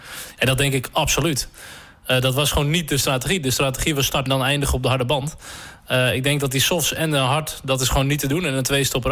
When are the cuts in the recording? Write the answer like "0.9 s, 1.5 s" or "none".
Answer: 4.3 s